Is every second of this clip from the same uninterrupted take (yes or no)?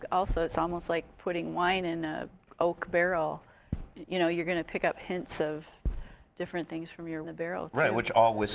no